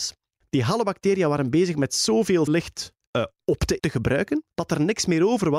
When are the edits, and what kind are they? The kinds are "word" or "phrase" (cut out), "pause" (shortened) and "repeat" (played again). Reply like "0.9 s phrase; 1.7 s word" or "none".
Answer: 2.5 s phrase; 3.1 s pause; 3.8 s word; 4.5 s pause